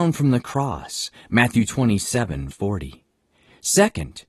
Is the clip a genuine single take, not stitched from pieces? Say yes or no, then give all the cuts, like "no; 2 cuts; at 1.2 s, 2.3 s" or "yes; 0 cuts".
no; 1 cut; at 2.5 s